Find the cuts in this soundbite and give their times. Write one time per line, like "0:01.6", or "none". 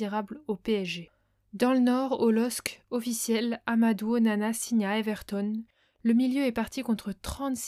none